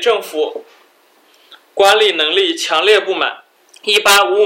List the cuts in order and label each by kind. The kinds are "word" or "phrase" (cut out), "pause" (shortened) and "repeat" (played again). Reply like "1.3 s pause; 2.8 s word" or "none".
3.6 s pause